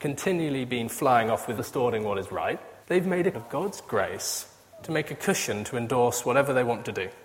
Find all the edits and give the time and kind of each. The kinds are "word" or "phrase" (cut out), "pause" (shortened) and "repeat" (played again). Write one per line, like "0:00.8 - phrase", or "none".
0:01.6 - word
0:02.8 - pause
0:03.3 - phrase